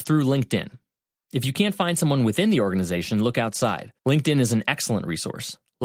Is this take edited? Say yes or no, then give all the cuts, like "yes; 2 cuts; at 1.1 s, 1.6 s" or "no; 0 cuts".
yes; 1 cut; at 4.0 s